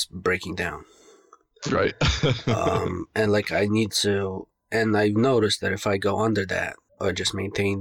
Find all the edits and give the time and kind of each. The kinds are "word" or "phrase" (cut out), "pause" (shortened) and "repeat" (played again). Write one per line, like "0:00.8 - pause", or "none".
none